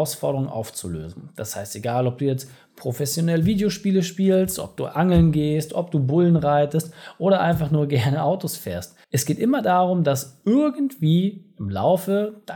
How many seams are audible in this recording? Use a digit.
1